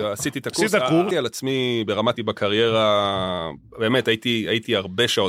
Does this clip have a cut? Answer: yes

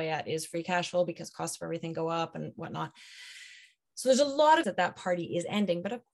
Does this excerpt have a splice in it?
yes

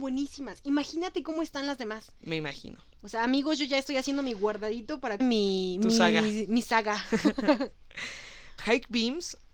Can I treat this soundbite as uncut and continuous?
no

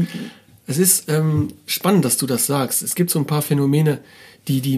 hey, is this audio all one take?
yes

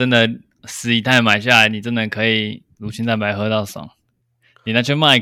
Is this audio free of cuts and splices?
yes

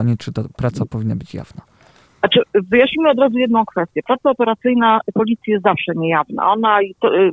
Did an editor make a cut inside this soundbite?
no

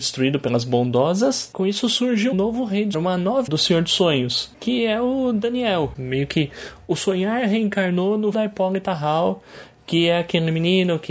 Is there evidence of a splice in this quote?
yes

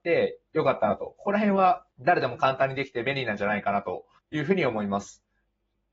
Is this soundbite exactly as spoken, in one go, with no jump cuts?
no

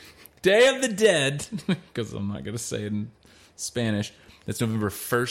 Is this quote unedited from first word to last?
yes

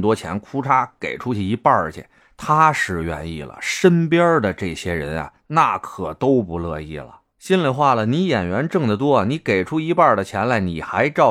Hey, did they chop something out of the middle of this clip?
no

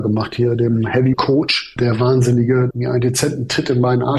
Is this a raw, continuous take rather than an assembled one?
no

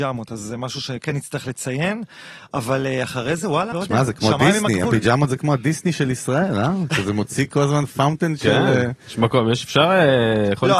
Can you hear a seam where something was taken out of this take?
yes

